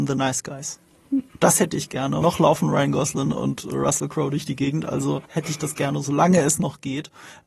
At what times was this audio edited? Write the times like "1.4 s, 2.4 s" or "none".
2.2 s, 5.3 s

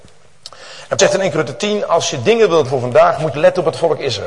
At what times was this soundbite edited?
1.0 s, 2.7 s, 3.3 s

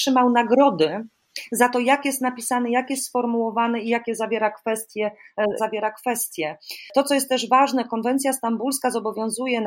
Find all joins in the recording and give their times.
5.6 s

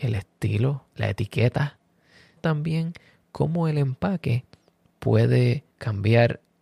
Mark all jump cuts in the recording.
0.9 s, 2.4 s, 5.7 s

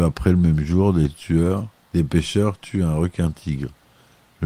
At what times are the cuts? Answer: 1.8 s

